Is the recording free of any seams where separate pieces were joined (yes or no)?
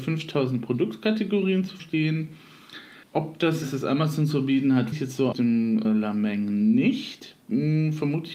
no